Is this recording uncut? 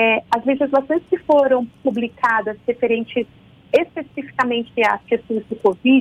yes; 0 cuts

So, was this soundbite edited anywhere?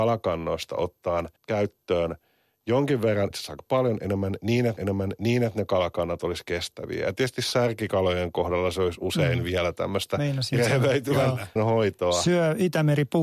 yes; 4 cuts; at 1.4 s, 3.3 s, 4.8 s, 11.6 s

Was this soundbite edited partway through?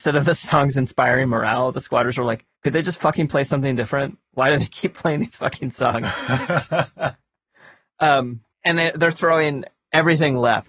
yes; 2 cuts; at 2.5 s, 8.5 s

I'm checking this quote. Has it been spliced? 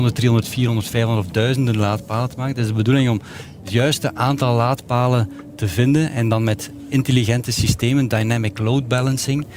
no; 0 cuts

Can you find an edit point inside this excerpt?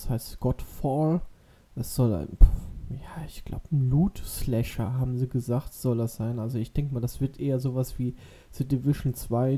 no; 0 cuts

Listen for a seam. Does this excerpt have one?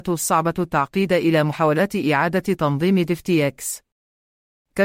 no; 0 cuts

